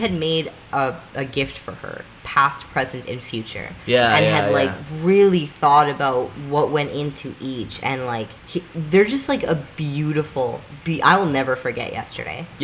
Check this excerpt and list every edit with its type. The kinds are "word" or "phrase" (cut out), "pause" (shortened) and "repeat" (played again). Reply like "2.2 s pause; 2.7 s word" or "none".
8.4 s pause